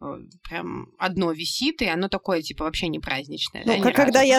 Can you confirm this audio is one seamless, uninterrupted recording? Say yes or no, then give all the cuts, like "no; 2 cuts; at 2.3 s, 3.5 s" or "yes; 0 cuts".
yes; 0 cuts